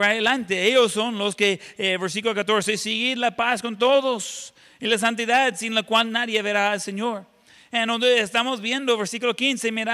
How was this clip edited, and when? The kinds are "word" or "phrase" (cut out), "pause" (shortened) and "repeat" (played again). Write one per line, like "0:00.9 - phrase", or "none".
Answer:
none